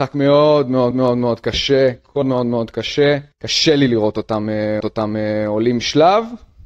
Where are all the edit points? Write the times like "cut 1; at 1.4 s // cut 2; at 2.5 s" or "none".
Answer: cut 1; at 0.9 s // cut 2; at 2.2 s // cut 3; at 3.3 s // cut 4; at 4.8 s